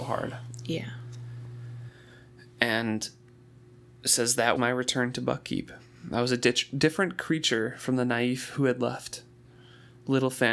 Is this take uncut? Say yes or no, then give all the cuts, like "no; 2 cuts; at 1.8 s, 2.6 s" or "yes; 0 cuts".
no; 1 cut; at 4.6 s